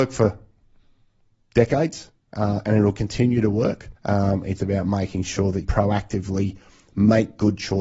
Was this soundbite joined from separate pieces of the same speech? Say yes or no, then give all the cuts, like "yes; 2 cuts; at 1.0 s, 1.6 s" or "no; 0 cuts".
yes; 3 cuts; at 4.0 s, 4.6 s, 5.6 s